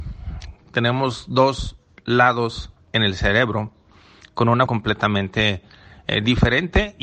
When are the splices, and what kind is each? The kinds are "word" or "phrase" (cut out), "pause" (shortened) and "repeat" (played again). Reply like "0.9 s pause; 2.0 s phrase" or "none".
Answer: 4.7 s word